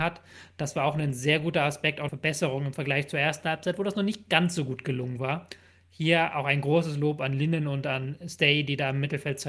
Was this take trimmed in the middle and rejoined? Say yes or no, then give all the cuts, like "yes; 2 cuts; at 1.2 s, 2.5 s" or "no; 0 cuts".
yes; 1 cut; at 2.1 s